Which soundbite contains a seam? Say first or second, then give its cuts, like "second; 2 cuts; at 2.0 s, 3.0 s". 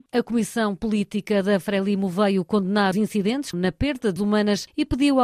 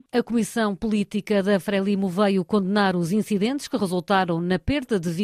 first; 3 cuts; at 2.9 s, 3.5 s, 4.2 s